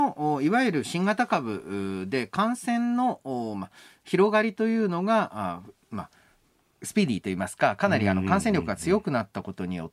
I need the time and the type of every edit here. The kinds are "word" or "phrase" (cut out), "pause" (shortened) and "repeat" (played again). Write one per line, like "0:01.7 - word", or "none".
none